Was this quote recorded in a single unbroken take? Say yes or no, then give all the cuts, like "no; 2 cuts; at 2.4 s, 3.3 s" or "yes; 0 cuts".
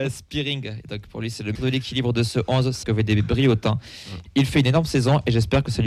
no; 2 cuts; at 1.6 s, 2.8 s